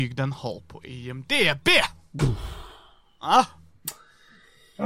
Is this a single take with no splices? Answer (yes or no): yes